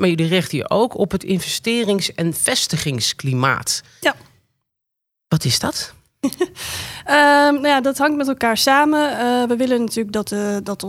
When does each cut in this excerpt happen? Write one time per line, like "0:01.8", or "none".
none